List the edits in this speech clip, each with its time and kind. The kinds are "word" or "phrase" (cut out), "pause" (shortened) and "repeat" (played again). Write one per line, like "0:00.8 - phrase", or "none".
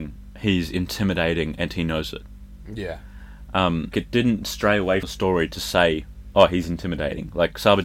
0:03.9 - word
0:05.0 - word